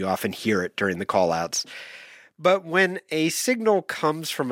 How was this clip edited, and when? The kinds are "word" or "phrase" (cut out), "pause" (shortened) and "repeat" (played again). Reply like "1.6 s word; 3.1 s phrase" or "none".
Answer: none